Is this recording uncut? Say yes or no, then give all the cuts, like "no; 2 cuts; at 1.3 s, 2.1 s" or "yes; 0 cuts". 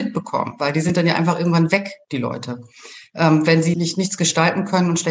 no; 1 cut; at 3.7 s